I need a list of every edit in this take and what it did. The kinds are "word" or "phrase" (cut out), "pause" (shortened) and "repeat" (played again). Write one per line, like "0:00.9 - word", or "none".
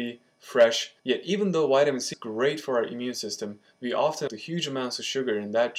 0:01.0 - pause
0:02.1 - word
0:04.3 - word

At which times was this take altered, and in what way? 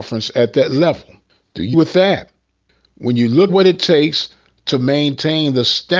0:01.7 - word
0:03.5 - word

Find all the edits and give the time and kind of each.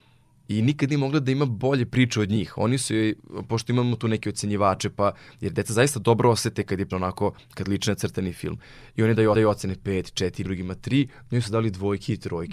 0:06.9 - word
0:09.3 - repeat
0:10.4 - word

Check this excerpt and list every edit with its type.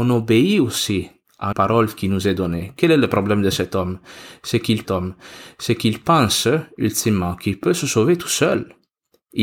0:01.5 - word
0:04.8 - repeat

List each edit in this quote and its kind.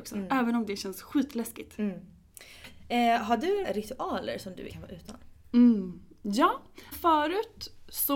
0:03.6 - word
0:04.7 - word
0:06.9 - word

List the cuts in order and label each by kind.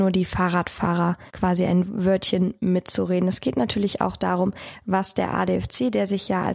0:01.3 - pause

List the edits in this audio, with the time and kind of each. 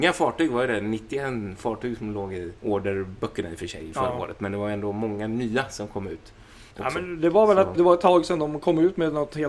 0:02.6 - pause
0:06.7 - pause
0:07.7 - word

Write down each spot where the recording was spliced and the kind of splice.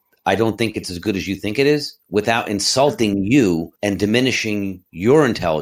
0:03.8 - pause

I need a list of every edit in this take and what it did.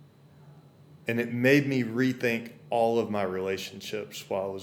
none

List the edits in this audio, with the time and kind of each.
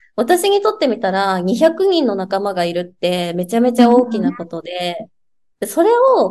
none

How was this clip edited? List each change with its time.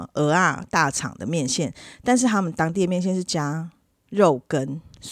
none

